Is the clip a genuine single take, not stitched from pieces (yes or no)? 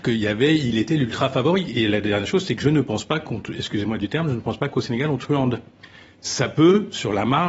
yes